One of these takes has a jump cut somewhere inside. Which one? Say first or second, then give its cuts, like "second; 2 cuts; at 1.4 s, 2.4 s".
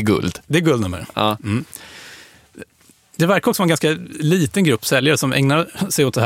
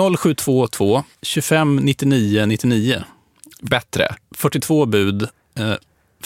second; 1 cut; at 1.1 s